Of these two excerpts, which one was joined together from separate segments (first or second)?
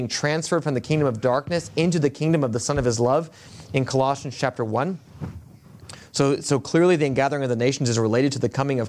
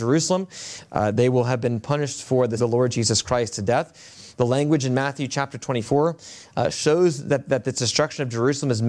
second